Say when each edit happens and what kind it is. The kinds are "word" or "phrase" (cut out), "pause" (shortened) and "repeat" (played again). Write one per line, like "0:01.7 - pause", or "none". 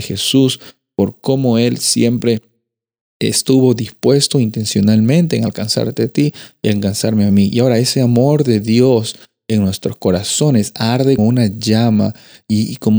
0:11.2 - word